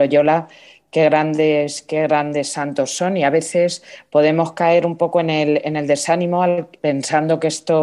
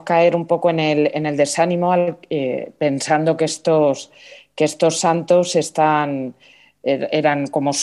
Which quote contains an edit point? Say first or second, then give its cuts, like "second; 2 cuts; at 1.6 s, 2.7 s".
first; 1 cut; at 6.8 s